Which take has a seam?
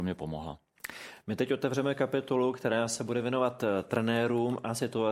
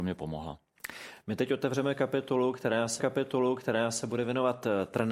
second; 1 cut; at 3.0 s

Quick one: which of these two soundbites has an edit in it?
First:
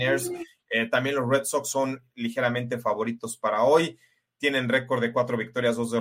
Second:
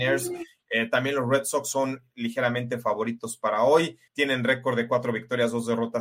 second; 1 cut; at 4.1 s

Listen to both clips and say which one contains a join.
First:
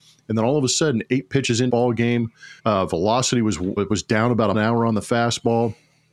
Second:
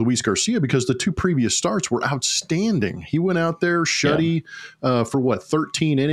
first; 4 cuts; at 1.7 s, 2.6 s, 3.8 s, 4.5 s

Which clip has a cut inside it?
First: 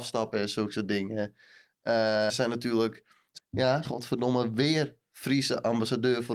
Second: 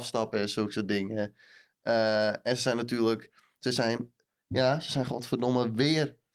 first; 3 cuts; at 2.3 s, 3.4 s, 3.9 s

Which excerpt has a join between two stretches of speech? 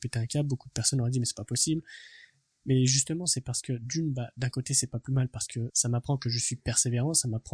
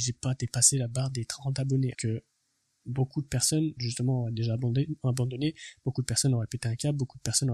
second; 1 cut; at 1.9 s

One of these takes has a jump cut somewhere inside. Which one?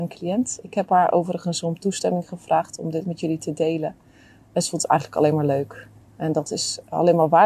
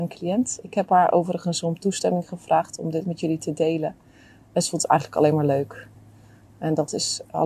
first; 1 cut; at 6.0 s

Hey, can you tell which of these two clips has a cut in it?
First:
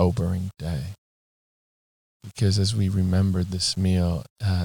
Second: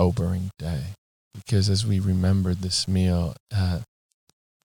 second; 1 cut; at 1.1 s

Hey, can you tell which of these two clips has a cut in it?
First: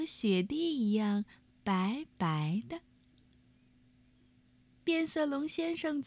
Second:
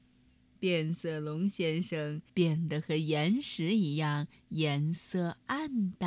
second; 1 cut; at 2.3 s

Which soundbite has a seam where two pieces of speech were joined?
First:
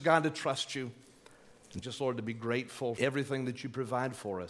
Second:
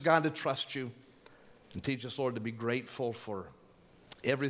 first; 2 cuts; at 1.8 s, 3.0 s

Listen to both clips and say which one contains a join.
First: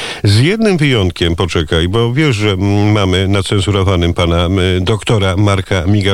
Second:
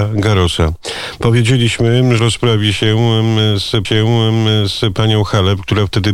second; 2 cuts; at 2.2 s, 3.8 s

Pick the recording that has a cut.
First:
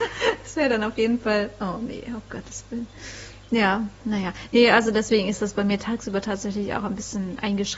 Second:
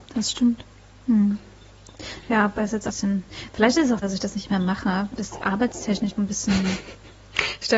second; 5 cuts; at 2.6 s, 2.9 s, 4.0 s, 5.1 s, 6.2 s

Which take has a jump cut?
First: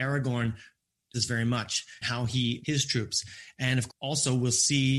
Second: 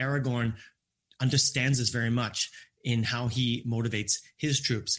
first; 4 cuts; at 1.1 s, 2.0 s, 2.6 s, 3.9 s

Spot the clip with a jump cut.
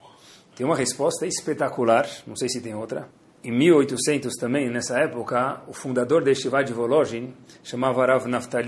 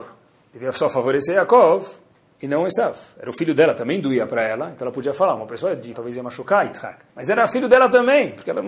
second; 2 cuts; at 5.9 s, 7.1 s

